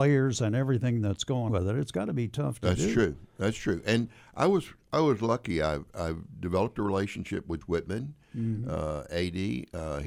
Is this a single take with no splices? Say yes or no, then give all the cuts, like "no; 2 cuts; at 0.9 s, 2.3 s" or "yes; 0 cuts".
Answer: no; 2 cuts; at 1.5 s, 7.6 s